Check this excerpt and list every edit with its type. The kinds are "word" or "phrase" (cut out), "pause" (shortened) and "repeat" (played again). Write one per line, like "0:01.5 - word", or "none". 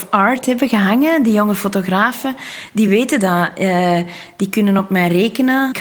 none

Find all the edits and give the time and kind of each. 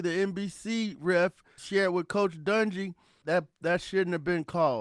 0:01.6 - word
0:03.2 - word

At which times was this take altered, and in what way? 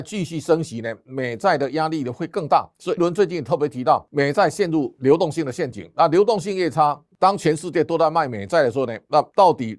0:03.0 - word

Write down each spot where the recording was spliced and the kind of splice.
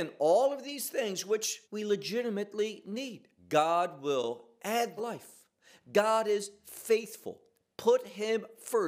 0:01.6 - pause
0:03.4 - pause
0:05.0 - phrase

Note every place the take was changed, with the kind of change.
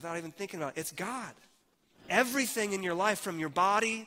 none

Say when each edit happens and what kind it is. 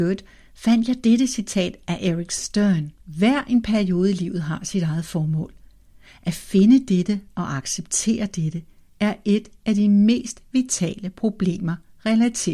0:03.0 - pause

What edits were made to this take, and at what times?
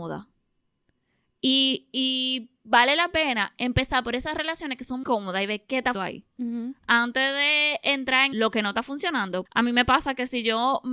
0:05.0 - word
0:05.9 - word
0:08.3 - word
0:09.5 - word

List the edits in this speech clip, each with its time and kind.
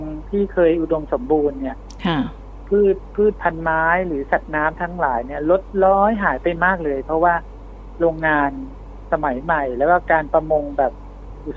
none

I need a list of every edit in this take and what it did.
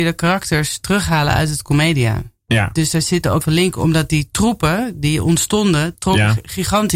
0:03.4 - word

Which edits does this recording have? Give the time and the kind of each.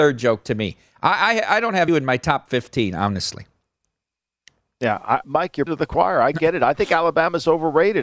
0:01.9 - word
0:05.2 - word
0:05.7 - word

